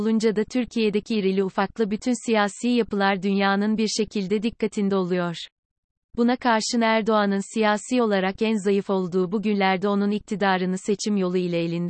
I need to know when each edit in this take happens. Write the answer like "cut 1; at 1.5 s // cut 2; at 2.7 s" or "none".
none